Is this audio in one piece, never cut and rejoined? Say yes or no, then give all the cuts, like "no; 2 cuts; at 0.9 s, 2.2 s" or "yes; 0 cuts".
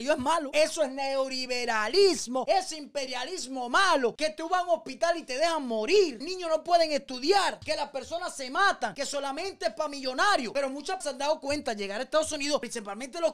no; 2 cuts; at 6.2 s, 11.0 s